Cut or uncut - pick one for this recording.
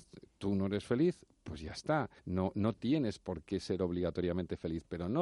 cut